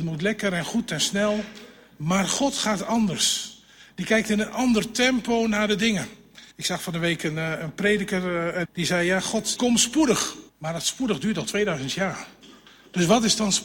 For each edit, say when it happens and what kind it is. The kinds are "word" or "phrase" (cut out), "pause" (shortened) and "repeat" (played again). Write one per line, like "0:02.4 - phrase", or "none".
0:06.5 - pause
0:08.6 - word
0:09.6 - phrase
0:10.5 - pause